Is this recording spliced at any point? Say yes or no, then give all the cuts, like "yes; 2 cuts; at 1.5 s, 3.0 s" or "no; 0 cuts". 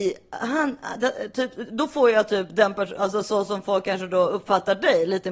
no; 0 cuts